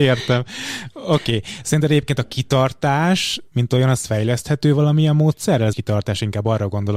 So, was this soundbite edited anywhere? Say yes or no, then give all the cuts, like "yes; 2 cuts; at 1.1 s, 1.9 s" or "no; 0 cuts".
yes; 1 cut; at 5.7 s